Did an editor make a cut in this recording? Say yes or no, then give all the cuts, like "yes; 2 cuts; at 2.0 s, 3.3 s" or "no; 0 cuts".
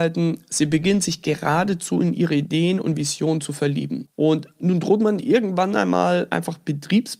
no; 0 cuts